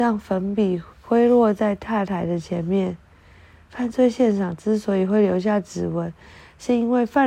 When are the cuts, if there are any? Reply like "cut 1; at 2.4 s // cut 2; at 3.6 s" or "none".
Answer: cut 1; at 0.9 s